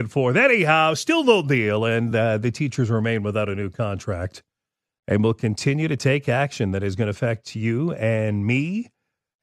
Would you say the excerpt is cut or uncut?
uncut